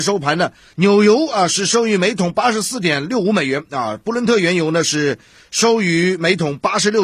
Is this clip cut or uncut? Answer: uncut